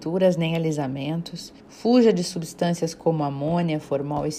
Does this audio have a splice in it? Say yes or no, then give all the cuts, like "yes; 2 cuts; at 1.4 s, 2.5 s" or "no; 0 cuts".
yes; 1 cut; at 1.6 s